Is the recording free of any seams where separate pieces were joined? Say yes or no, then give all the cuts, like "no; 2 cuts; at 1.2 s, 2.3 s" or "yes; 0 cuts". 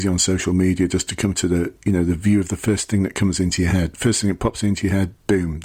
yes; 0 cuts